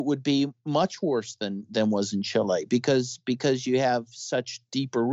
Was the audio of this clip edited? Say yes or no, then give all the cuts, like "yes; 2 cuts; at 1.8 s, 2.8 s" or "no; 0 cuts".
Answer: no; 0 cuts